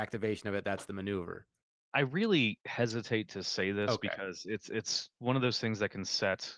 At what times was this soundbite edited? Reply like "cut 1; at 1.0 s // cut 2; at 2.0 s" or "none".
none